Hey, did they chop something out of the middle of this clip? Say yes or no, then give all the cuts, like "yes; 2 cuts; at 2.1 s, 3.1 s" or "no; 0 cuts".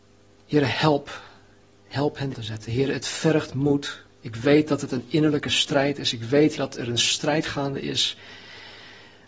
yes; 2 cuts; at 2.3 s, 6.6 s